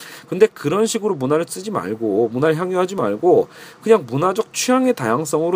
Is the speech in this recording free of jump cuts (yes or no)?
yes